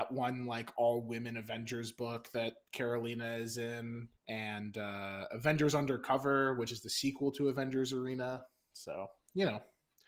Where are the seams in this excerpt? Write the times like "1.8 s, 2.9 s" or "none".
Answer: 4.2 s